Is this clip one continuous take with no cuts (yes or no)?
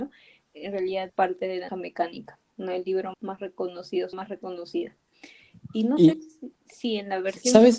no